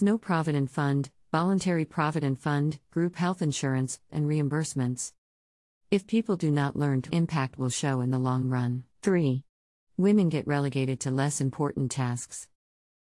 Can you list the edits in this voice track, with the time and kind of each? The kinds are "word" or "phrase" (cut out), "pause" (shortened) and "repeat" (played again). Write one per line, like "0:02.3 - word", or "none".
0:04.1 - word
0:07.1 - phrase
0:08.9 - pause